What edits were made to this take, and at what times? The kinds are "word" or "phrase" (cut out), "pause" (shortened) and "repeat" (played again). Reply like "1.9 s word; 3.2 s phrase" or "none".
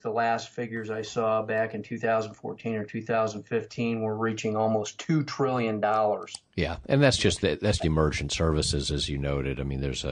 7.8 s word